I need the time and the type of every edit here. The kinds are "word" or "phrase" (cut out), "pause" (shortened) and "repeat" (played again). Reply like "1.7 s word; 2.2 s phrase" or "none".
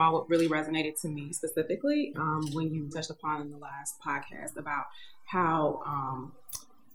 2.1 s word; 2.9 s word; 4.0 s word